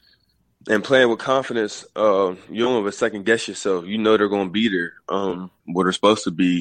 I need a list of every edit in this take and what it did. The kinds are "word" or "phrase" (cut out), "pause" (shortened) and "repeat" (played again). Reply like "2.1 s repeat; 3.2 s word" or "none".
none